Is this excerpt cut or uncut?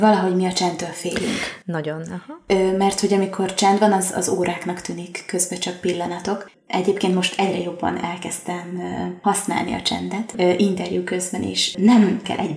uncut